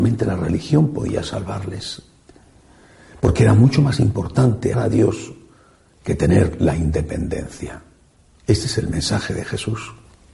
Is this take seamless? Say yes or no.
no